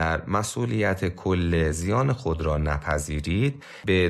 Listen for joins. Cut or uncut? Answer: uncut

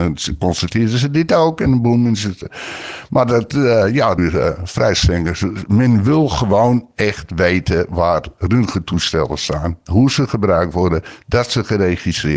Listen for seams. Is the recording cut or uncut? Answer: cut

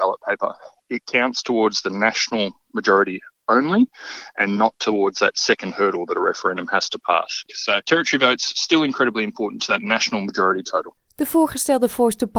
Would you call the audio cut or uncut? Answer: uncut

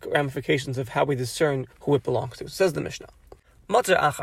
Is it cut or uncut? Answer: cut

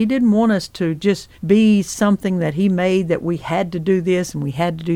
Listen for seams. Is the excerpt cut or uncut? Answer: cut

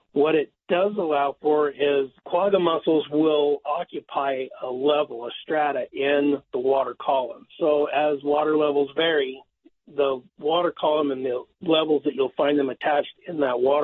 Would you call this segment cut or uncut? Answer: cut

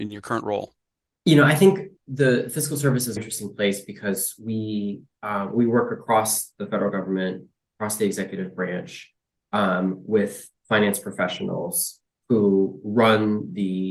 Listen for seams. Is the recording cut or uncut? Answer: cut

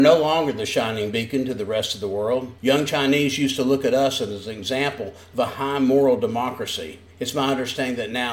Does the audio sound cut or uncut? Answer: cut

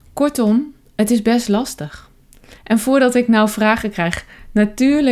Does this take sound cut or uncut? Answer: cut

